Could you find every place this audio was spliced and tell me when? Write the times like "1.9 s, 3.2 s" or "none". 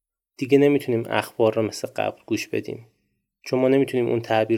none